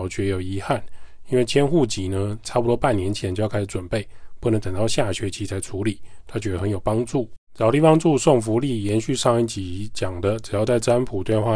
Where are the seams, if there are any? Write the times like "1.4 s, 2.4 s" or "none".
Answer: 7.4 s